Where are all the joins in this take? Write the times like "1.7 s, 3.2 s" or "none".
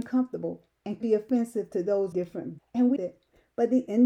1.0 s, 2.1 s, 2.6 s, 3.0 s